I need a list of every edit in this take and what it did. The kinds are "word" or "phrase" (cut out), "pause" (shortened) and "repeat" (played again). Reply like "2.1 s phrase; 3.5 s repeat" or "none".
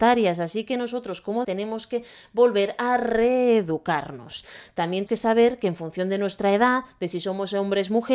1.4 s word; 5.1 s word